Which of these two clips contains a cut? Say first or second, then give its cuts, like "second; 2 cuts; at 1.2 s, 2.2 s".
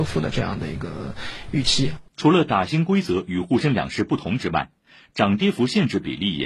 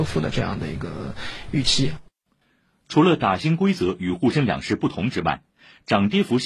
first; 1 cut; at 2.1 s